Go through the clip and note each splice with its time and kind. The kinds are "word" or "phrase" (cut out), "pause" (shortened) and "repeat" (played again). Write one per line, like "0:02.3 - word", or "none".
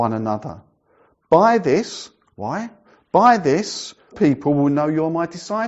0:04.1 - word